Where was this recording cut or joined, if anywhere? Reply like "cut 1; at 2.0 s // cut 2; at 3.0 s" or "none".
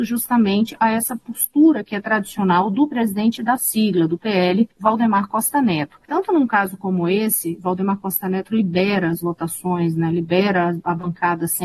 cut 1; at 4.7 s // cut 2; at 6.0 s